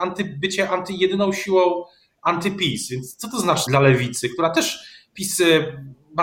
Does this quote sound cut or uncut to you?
cut